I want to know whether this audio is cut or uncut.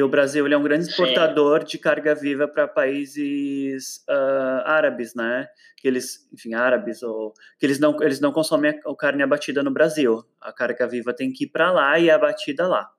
uncut